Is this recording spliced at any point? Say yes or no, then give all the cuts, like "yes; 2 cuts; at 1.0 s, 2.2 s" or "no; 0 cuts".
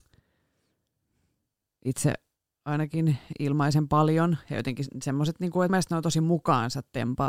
yes; 1 cut; at 5.7 s